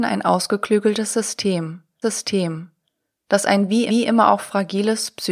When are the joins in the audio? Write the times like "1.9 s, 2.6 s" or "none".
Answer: 2.0 s, 3.9 s